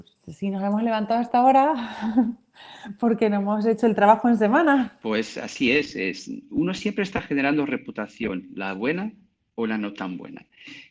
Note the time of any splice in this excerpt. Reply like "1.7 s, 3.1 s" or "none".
none